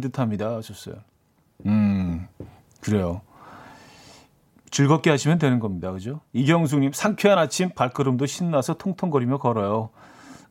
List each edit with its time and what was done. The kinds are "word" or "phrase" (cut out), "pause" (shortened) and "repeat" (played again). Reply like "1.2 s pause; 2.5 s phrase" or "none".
none